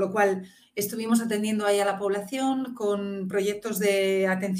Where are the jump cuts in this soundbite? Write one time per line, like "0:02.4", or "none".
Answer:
none

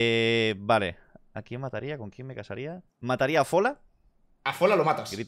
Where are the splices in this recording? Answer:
0:02.9

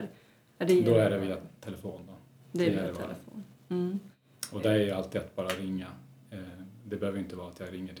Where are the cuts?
none

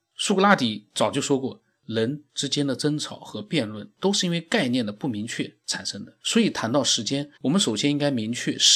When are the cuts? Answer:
0:06.2
0:07.4

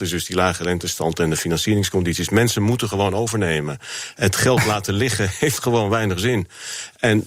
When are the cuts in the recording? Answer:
none

